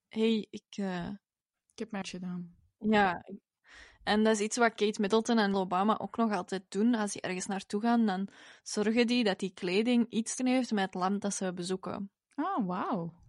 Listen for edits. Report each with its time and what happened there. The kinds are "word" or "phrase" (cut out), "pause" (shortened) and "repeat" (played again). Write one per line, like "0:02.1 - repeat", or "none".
0:02.0 - word
0:05.5 - word
0:10.4 - word